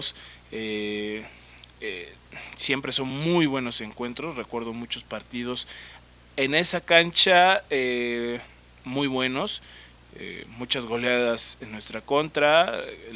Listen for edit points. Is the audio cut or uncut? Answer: uncut